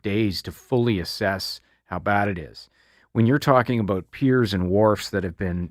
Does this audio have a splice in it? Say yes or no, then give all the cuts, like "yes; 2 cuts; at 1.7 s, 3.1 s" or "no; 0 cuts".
no; 0 cuts